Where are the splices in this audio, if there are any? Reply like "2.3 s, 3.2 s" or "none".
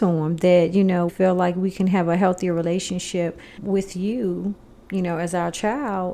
1.1 s, 3.6 s